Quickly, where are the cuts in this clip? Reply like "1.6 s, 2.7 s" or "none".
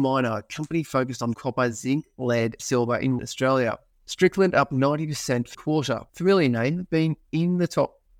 1.3 s, 2.6 s, 3.2 s, 3.9 s, 5.5 s, 6.1 s, 6.9 s